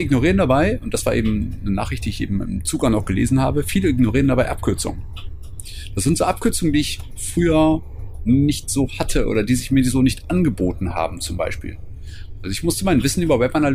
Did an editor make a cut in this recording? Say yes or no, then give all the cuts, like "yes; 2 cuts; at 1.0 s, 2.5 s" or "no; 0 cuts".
no; 0 cuts